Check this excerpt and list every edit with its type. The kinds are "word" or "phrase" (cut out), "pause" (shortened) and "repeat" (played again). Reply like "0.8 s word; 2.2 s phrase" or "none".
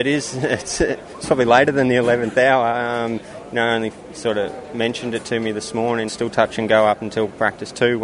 6.1 s phrase